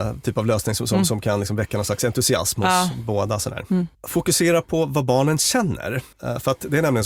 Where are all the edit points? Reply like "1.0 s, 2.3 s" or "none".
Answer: 6.1 s